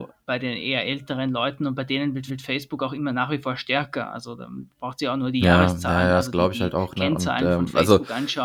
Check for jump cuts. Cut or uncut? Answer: cut